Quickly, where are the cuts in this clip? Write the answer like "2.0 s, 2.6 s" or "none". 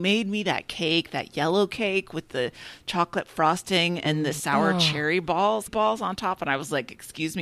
5.7 s